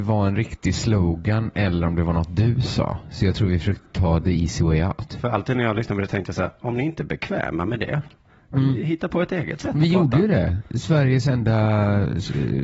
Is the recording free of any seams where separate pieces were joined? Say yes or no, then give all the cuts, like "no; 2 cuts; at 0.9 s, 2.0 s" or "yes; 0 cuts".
yes; 0 cuts